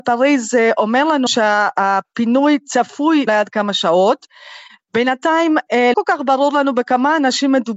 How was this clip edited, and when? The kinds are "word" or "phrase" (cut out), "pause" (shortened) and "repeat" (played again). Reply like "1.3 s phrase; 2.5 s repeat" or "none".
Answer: 1.3 s word; 3.3 s phrase; 5.9 s word